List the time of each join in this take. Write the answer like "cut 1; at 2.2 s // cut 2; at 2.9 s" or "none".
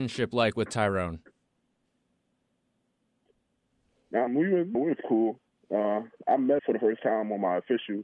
cut 1; at 4.3 s // cut 2; at 4.7 s // cut 3; at 6.6 s